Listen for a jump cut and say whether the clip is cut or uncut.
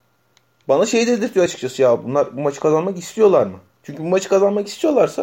uncut